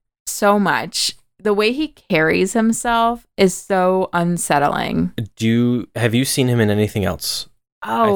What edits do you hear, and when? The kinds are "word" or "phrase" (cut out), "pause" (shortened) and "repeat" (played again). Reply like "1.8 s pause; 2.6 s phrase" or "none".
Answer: none

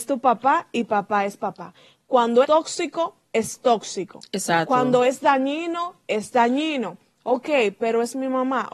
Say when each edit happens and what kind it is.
2.4 s word

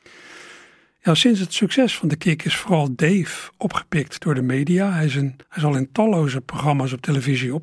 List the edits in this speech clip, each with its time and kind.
5.4 s pause

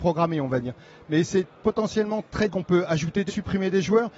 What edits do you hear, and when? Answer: 1.5 s pause; 2.5 s phrase; 3.3 s word

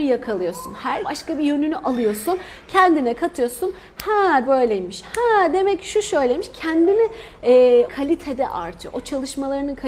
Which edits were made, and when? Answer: 1.0 s word; 4.5 s phrase; 7.9 s word

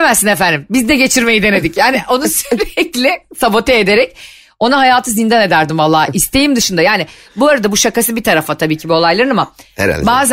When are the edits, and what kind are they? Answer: none

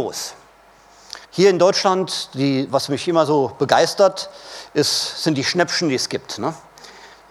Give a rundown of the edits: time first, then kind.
1.2 s pause

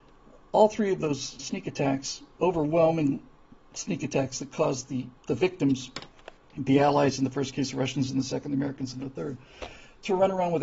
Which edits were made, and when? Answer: 1.4 s word; 5.2 s pause; 6.4 s pause

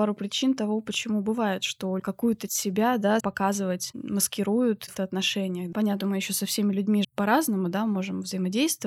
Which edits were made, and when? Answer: 2.0 s word; 2.5 s word; 3.2 s word; 5.0 s word; 6.0 s word; 7.0 s word

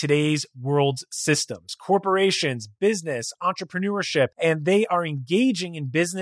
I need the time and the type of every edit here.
4.3 s pause

